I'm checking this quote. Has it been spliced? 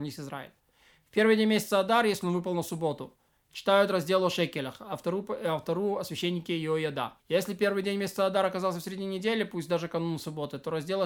yes; 1 cut; at 7.2 s

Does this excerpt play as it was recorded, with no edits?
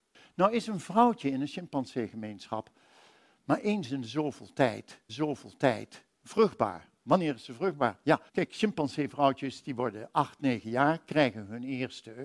no; 2 cuts; at 5.1 s, 8.3 s

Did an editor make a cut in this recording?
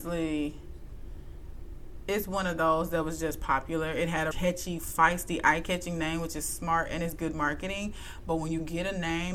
yes; 1 cut; at 4.3 s

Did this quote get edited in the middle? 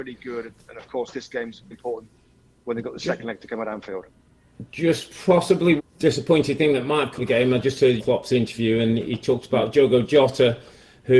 yes; 4 cuts; at 1.7 s, 5.8 s, 7.2 s, 8.0 s

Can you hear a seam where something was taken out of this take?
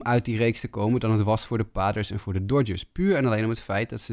no; 0 cuts

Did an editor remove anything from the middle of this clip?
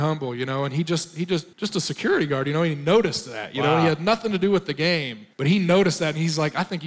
yes; 2 cuts; at 1.5 s, 5.3 s

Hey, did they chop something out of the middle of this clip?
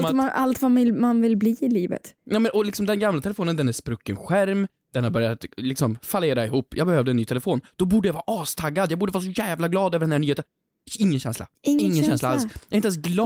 yes; 2 cuts; at 2.2 s, 11.6 s

